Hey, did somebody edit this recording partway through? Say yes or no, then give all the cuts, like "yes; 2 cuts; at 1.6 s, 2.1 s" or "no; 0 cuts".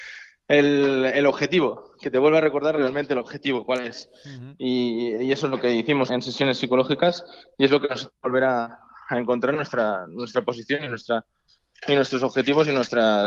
yes; 1 cut; at 6.1 s